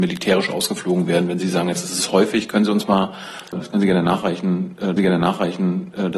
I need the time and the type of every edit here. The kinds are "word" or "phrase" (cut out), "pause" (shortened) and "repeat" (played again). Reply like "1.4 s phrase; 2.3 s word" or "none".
3.5 s word; 5.0 s repeat